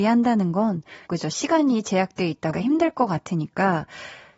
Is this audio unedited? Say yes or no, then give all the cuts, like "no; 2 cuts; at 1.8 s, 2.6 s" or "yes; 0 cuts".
no; 2 cuts; at 1.1 s, 2.5 s